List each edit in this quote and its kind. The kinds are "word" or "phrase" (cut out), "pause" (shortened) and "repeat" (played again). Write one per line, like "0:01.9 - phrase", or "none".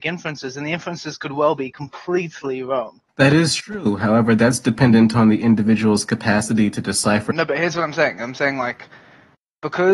0:03.1 - pause